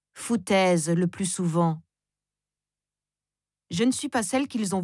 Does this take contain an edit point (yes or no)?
no